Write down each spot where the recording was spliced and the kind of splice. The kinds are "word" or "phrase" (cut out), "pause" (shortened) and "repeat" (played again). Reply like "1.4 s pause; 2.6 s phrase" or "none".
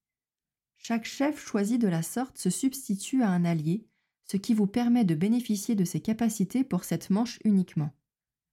none